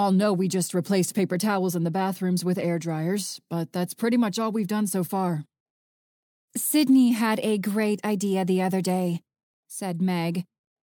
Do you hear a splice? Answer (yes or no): no